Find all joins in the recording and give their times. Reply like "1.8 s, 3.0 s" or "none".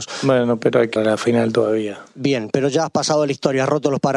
1.0 s